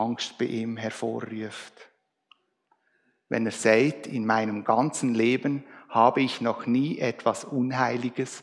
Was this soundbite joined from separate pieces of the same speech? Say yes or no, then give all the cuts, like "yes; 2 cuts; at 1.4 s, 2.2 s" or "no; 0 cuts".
no; 0 cuts